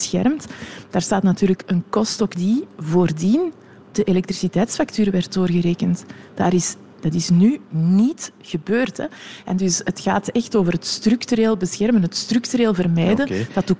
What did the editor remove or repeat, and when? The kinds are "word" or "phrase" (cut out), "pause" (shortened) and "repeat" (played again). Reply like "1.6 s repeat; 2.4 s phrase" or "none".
2.3 s word; 3.9 s word